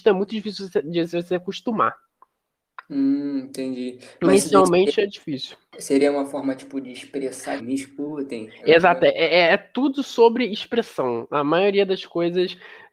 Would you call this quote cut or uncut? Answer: cut